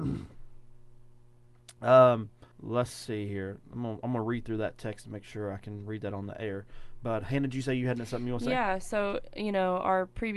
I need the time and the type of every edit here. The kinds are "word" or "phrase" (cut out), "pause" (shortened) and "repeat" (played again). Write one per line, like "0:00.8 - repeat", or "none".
0:02.5 - pause